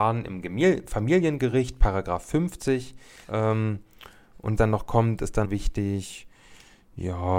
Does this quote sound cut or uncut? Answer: cut